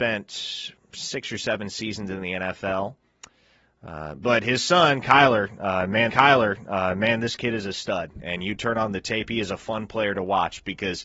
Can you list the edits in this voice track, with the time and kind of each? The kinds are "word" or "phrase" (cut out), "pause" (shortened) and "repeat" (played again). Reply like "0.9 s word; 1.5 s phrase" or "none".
6.1 s repeat